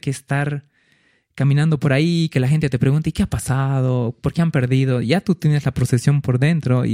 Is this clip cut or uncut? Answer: uncut